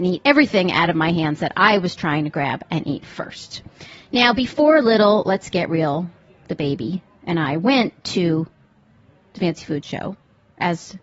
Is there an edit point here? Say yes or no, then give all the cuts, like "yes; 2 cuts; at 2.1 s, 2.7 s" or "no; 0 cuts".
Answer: no; 0 cuts